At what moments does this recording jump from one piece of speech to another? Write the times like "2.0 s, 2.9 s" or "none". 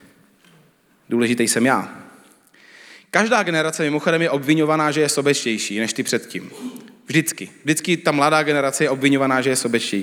none